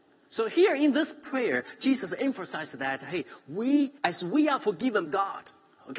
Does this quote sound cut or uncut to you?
cut